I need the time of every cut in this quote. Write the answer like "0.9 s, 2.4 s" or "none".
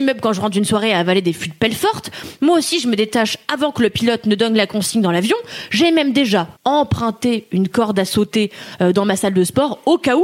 6.6 s